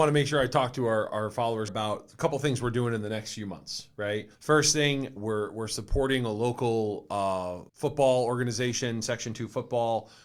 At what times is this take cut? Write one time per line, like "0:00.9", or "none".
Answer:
0:01.1
0:01.7
0:04.3
0:05.2
0:07.7